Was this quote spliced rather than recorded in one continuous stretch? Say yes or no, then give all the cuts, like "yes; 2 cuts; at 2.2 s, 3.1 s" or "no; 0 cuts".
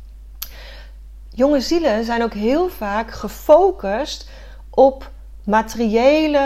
no; 0 cuts